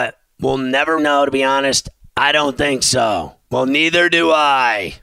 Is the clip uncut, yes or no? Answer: no